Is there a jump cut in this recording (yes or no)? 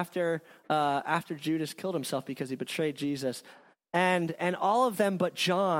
no